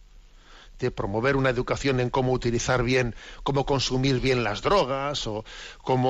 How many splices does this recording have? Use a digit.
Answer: 0